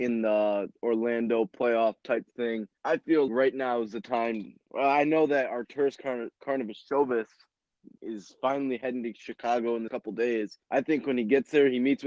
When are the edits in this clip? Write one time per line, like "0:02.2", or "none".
0:02.8
0:03.3
0:06.4
0:08.0
0:09.9
0:10.6